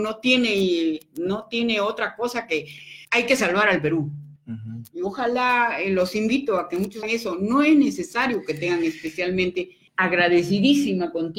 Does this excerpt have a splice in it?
yes; 4 cuts; at 3.0 s, 4.4 s, 7.0 s, 9.9 s

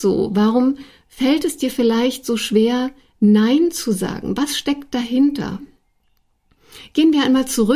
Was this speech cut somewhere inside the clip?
no; 0 cuts

